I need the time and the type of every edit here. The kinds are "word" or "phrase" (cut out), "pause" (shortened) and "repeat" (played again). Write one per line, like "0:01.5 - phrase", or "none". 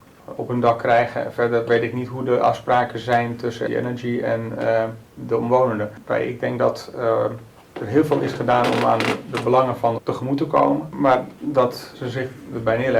0:03.7 - word
0:07.6 - pause
0:10.0 - word